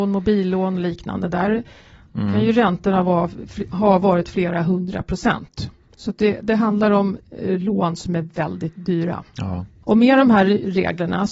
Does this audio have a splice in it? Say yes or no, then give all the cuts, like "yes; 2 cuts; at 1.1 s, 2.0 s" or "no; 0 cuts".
no; 0 cuts